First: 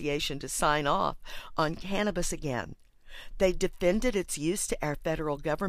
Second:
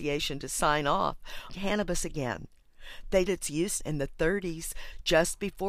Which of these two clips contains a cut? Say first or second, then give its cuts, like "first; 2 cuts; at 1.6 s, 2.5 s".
second; 3 cuts; at 1.5 s, 3.3 s, 3.8 s